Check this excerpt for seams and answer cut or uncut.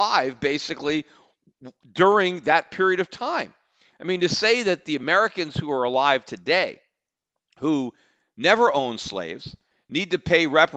uncut